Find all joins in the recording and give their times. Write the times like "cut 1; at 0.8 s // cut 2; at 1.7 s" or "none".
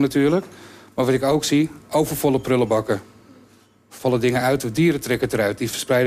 none